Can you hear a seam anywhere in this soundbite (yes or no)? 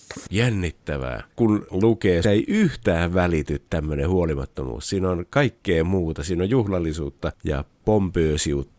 yes